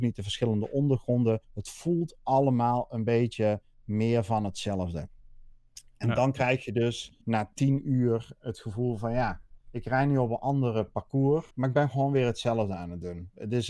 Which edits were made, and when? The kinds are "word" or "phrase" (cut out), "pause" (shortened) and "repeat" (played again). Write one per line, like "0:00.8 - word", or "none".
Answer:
0:01.4 - pause
0:07.2 - pause
0:09.6 - pause
0:11.5 - pause